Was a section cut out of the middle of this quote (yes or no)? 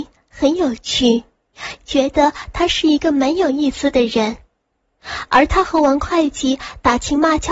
no